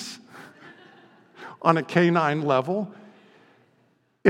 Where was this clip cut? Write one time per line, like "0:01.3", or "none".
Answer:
none